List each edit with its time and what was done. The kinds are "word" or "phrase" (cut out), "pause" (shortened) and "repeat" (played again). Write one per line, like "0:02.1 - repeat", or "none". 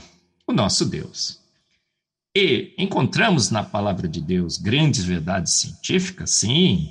none